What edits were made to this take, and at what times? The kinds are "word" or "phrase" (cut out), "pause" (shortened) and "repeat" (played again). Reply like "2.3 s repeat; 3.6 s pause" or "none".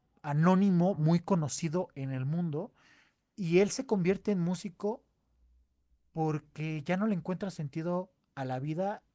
none